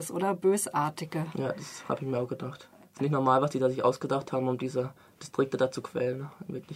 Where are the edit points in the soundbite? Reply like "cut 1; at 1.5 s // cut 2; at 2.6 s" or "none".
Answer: none

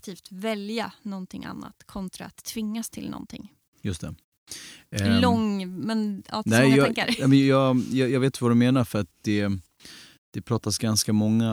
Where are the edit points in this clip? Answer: none

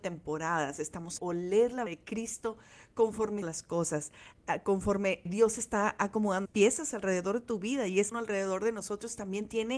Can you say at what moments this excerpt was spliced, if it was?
cut 1; at 1.2 s // cut 2; at 1.9 s // cut 3; at 3.4 s // cut 4; at 5.3 s // cut 5; at 6.5 s // cut 6; at 8.1 s

